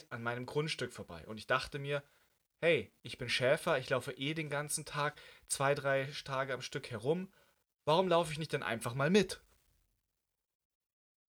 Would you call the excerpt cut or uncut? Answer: uncut